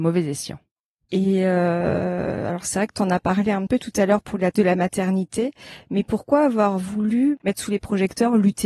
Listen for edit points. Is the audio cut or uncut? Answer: cut